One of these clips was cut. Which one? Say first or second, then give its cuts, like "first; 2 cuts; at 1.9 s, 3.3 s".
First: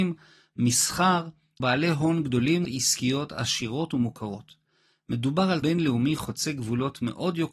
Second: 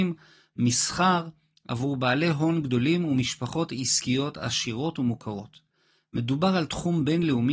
first; 3 cuts; at 1.6 s, 2.6 s, 5.6 s